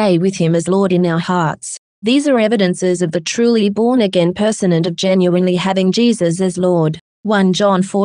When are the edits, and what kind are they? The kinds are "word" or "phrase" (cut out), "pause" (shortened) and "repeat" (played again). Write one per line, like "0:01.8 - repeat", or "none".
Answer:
none